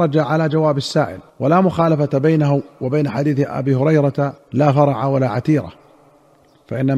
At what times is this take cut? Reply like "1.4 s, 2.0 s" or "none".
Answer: 1.3 s, 4.4 s